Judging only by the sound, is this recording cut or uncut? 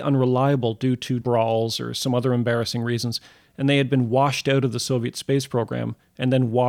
cut